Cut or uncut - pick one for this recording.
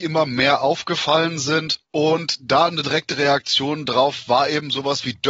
cut